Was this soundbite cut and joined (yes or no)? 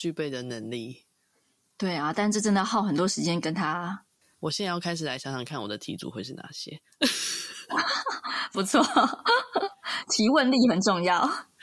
yes